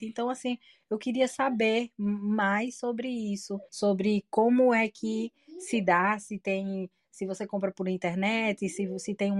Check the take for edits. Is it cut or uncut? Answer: cut